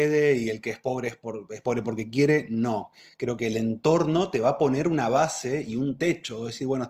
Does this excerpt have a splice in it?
no; 0 cuts

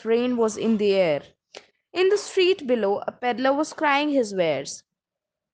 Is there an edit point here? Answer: no; 0 cuts

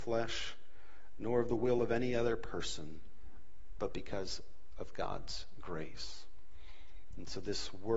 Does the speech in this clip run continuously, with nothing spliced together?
yes; 0 cuts

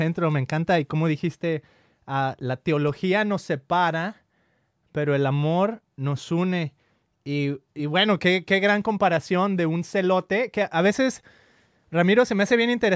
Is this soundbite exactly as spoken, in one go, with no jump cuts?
yes; 0 cuts

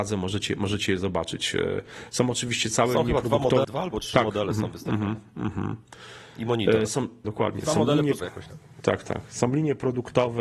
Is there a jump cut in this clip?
yes; 3 cuts; at 3.6 s, 7.2 s, 8.2 s

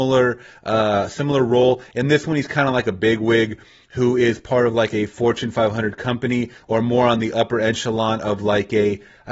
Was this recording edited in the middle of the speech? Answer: no; 0 cuts

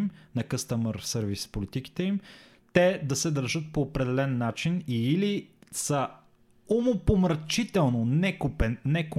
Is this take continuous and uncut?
yes; 0 cuts

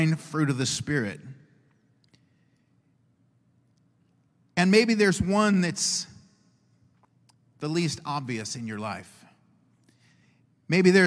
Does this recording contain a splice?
no; 0 cuts

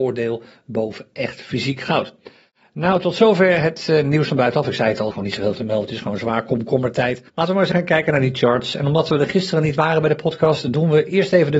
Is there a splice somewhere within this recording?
yes; 4 cuts; at 5.1 s, 5.5 s, 7.3 s, 7.7 s

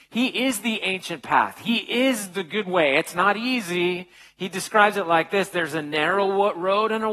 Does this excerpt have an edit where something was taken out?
no; 0 cuts

